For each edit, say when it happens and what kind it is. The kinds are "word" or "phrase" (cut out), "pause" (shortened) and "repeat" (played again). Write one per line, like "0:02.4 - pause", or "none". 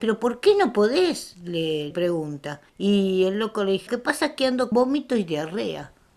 0:01.9 - word
0:02.7 - pause
0:03.9 - word
0:04.7 - word